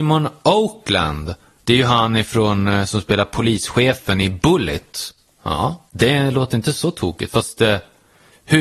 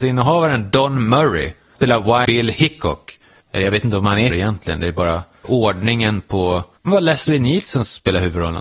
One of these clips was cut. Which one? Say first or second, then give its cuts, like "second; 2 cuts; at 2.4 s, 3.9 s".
second; 5 cuts; at 1.8 s, 2.2 s, 4.3 s, 5.4 s, 6.9 s